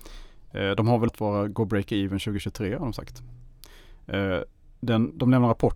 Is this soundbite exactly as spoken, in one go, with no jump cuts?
no; 1 cut; at 1.1 s

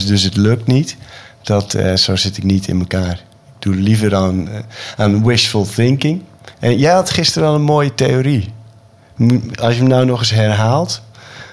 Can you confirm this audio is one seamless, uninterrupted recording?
no; 1 cut; at 6.5 s

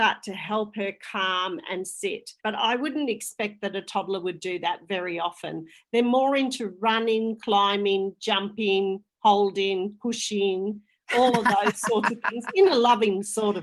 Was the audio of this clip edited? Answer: yes; 1 cut; at 2.4 s

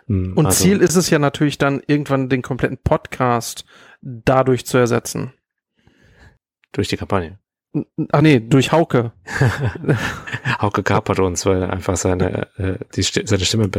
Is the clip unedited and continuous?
no; 1 cut; at 8.2 s

